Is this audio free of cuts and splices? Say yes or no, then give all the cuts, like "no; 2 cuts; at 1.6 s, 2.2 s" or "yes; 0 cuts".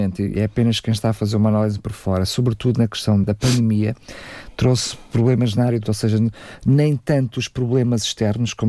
no; 2 cuts; at 3.2 s, 5.8 s